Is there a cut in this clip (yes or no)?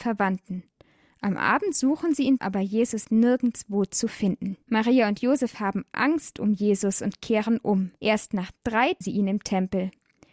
yes